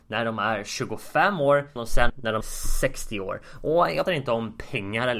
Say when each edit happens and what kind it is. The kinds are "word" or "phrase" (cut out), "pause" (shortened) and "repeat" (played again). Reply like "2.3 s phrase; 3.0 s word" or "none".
1.8 s word; 2.1 s word; 2.4 s word; 4.1 s word